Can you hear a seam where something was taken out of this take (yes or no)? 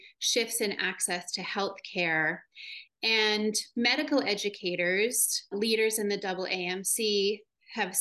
yes